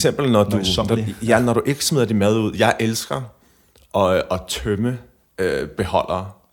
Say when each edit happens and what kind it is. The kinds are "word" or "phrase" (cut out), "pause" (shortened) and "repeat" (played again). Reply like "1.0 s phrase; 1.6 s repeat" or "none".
none